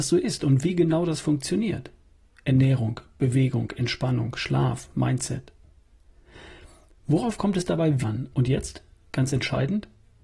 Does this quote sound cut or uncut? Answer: cut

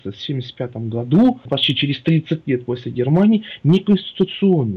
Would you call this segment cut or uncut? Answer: cut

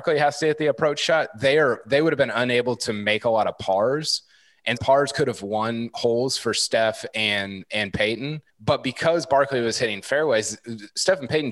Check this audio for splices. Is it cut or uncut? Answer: cut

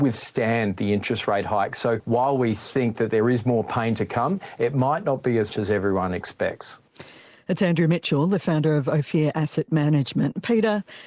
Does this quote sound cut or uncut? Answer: cut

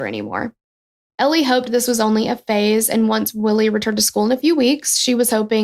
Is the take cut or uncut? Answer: uncut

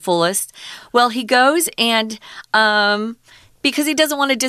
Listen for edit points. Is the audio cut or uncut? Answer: uncut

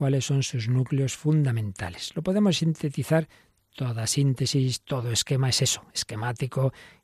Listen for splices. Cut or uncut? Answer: uncut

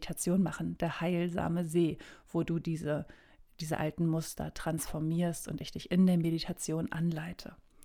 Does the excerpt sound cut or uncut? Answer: uncut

